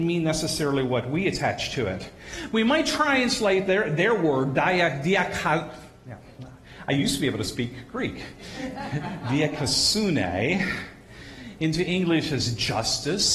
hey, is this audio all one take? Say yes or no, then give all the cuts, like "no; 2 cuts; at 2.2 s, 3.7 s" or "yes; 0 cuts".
yes; 0 cuts